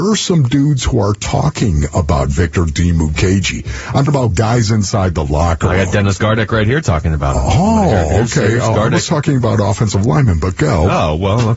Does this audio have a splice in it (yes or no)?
yes